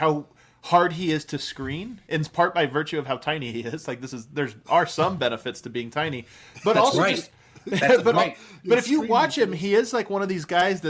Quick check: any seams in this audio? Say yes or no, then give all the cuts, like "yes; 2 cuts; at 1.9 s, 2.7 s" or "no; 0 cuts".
no; 0 cuts